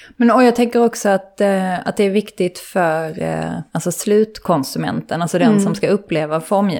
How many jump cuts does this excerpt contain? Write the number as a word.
one